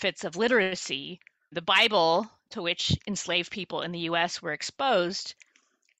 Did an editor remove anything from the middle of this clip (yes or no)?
yes